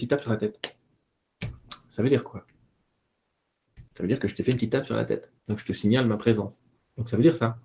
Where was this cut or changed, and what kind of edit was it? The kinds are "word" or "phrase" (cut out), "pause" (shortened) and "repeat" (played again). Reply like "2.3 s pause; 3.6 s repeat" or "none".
3.9 s pause; 5.4 s pause